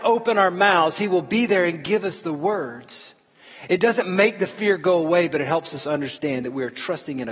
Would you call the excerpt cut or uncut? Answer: uncut